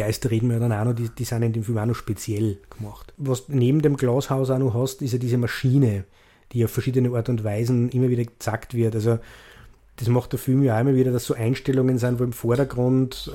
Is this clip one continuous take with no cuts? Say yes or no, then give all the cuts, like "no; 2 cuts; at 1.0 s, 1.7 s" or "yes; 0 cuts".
yes; 0 cuts